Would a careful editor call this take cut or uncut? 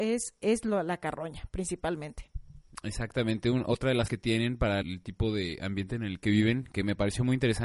cut